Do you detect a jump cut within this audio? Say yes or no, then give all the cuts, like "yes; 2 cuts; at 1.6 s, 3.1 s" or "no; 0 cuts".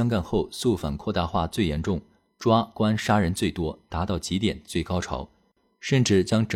no; 0 cuts